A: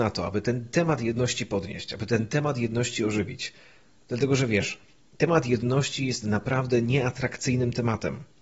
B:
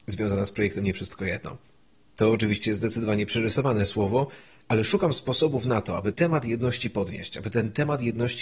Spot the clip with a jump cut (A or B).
B